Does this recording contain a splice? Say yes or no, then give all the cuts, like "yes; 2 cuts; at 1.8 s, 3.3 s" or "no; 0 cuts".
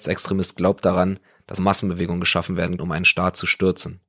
yes; 2 cuts; at 1.6 s, 2.8 s